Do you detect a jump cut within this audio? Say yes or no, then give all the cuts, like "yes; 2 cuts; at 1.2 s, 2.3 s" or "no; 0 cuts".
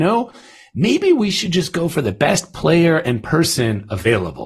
no; 0 cuts